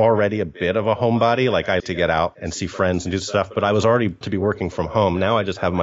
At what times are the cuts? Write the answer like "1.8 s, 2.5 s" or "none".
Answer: 1.8 s, 4.2 s